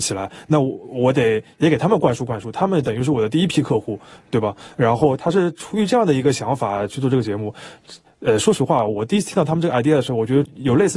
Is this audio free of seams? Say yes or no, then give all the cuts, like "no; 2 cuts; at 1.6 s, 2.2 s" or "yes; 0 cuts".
yes; 0 cuts